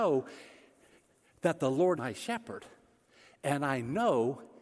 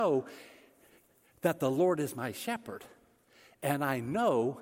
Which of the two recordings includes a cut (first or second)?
first